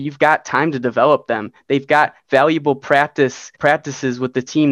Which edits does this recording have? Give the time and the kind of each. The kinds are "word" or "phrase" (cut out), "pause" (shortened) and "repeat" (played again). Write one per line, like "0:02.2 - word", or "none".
0:03.5 - pause